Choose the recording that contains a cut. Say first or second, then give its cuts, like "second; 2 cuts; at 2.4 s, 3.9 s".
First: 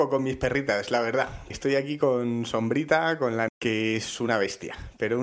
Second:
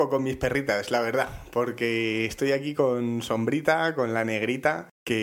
first; 2 cuts; at 1.5 s, 3.5 s